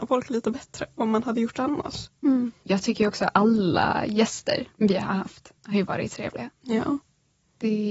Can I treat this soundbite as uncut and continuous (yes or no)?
no